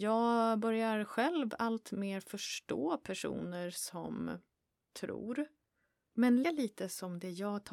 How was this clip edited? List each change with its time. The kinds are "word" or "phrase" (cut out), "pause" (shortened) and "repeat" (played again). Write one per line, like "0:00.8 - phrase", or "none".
0:06.4 - word